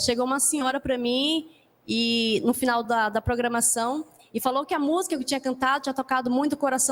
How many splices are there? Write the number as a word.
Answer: zero